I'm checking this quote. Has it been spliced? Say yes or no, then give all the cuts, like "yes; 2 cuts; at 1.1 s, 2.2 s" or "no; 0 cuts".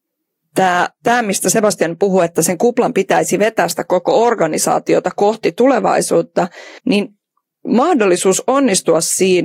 yes; 1 cut; at 6.8 s